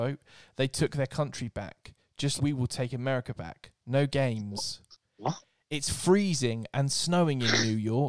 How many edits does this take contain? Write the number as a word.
one